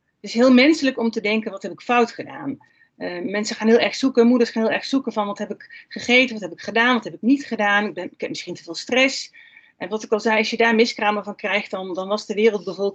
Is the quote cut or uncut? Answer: uncut